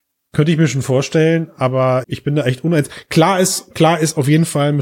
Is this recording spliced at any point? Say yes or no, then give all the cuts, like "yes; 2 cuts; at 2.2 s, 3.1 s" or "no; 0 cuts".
yes; 1 cut; at 2.0 s